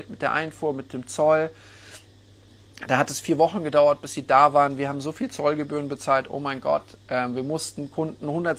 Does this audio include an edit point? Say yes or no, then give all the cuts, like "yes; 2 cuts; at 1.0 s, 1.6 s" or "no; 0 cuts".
no; 0 cuts